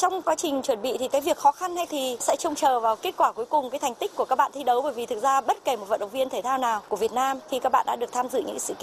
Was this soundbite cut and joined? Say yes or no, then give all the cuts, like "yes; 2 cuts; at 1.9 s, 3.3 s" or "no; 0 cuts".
yes; 1 cut; at 1.9 s